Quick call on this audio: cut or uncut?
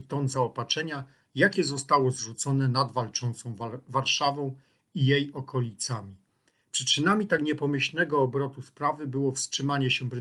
uncut